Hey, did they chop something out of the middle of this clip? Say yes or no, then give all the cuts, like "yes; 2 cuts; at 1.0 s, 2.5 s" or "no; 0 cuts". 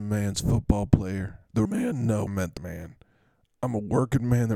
yes; 3 cuts; at 1.6 s, 2.3 s, 2.6 s